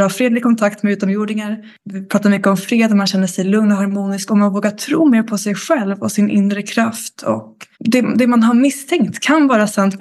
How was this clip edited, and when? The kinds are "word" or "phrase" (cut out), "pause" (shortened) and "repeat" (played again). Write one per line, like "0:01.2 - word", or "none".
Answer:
0:07.7 - pause